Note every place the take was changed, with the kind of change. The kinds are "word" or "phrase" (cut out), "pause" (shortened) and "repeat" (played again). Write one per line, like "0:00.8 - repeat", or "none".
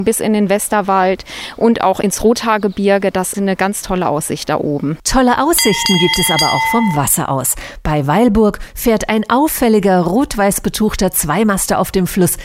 0:03.3 - word